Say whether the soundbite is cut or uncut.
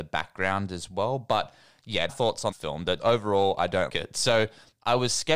cut